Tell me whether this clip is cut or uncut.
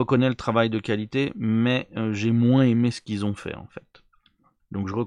uncut